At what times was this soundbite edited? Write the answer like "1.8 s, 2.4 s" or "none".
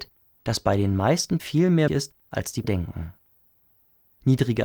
1.4 s, 1.9 s, 2.6 s